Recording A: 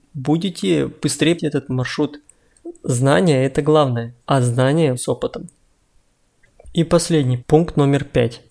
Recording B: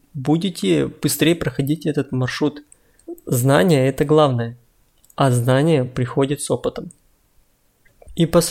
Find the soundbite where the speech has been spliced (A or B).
A